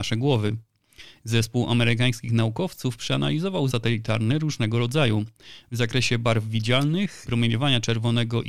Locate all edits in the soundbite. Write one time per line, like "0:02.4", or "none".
0:03.7
0:07.2

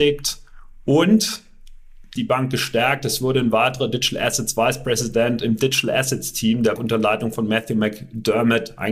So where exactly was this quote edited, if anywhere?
0:02.2
0:06.8

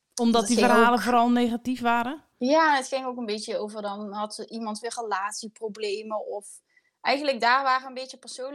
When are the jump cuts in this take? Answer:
none

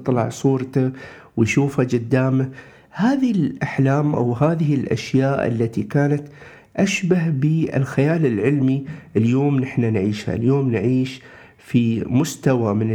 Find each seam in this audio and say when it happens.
none

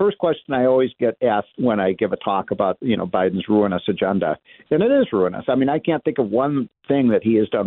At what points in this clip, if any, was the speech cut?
0:01.5

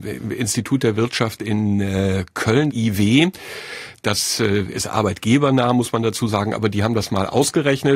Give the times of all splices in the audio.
0:02.7

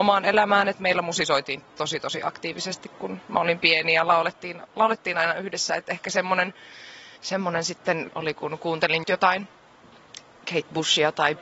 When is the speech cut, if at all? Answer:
0:07.2
0:08.1
0:09.0

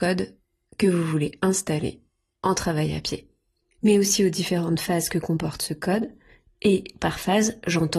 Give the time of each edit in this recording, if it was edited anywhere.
none

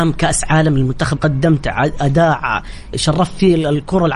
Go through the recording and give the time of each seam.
0:01.2
0:02.9

